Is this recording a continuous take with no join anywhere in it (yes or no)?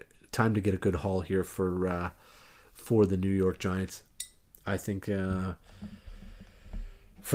yes